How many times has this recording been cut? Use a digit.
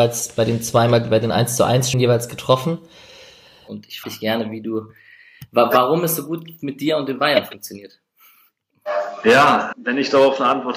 3